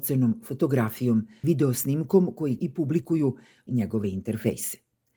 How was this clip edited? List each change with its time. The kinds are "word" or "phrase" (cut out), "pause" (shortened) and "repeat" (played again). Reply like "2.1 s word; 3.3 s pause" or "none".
1.4 s word; 2.6 s word; 3.7 s word